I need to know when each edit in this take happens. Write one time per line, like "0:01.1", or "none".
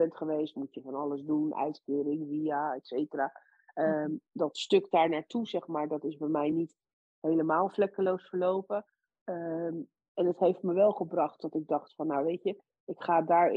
none